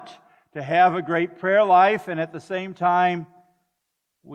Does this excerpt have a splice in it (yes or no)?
no